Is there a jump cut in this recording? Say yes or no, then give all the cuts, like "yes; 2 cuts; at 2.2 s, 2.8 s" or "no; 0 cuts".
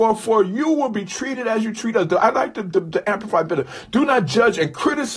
no; 0 cuts